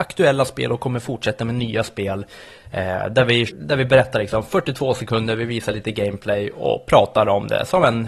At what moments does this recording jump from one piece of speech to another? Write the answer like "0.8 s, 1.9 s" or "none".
3.5 s